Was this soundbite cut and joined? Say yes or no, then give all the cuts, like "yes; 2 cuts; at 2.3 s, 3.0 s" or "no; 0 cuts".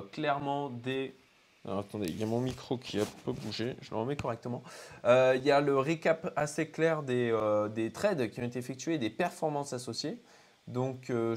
no; 0 cuts